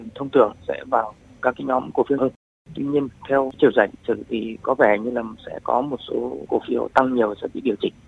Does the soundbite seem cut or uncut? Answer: cut